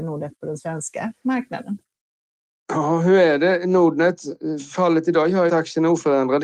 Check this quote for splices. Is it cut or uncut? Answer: cut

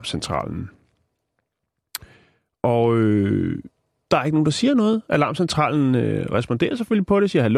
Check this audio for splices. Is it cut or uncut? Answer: uncut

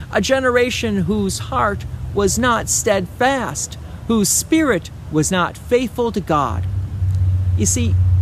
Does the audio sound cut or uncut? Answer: uncut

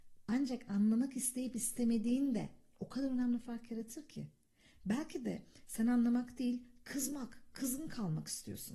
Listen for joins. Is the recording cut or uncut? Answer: uncut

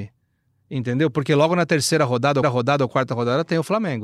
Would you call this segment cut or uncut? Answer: cut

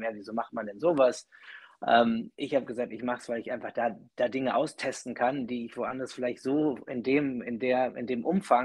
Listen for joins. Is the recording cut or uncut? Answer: cut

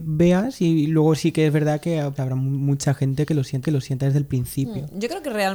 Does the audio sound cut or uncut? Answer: cut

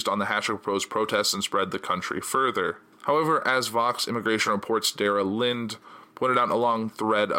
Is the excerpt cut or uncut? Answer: uncut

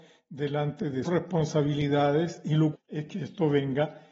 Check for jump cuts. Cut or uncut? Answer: cut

